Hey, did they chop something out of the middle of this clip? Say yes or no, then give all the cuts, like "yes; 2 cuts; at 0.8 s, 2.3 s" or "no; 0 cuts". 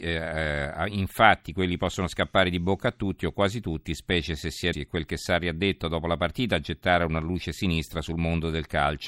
yes; 1 cut; at 4.7 s